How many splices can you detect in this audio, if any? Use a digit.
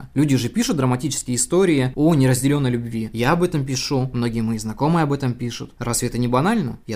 0